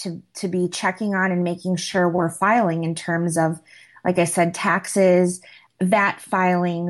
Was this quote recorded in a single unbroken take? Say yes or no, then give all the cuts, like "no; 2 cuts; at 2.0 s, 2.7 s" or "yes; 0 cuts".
yes; 0 cuts